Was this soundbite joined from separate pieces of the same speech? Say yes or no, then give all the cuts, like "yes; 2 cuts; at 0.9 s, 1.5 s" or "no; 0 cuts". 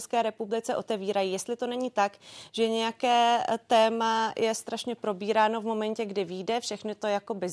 no; 0 cuts